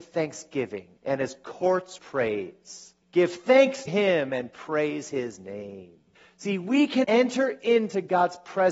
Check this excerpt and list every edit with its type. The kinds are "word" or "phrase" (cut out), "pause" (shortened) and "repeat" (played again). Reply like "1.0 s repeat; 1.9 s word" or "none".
1.0 s pause; 2.0 s word; 3.0 s pause; 3.9 s word; 6.1 s pause; 7.0 s word